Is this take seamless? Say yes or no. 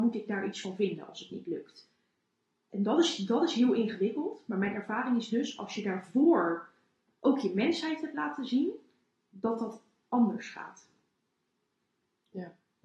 yes